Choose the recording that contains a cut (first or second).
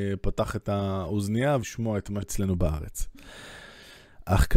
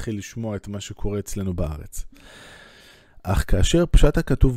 first